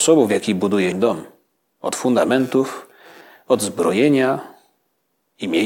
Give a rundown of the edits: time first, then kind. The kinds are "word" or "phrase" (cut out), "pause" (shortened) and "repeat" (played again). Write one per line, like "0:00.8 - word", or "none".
0:00.9 - word